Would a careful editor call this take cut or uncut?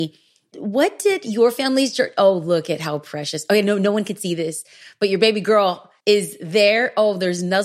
cut